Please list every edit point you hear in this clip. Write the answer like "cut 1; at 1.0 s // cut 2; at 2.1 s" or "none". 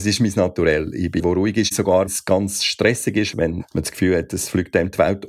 cut 1; at 1.2 s // cut 2; at 2.1 s